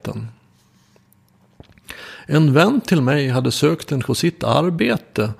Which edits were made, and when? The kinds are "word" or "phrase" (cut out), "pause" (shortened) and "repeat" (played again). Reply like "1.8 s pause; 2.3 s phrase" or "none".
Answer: 4.0 s word